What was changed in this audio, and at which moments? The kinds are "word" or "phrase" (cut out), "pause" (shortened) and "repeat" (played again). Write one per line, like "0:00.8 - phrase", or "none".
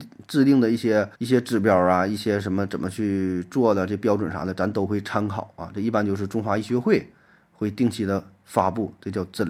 0:01.1 - pause